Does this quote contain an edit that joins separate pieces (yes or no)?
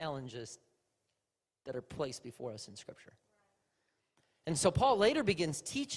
no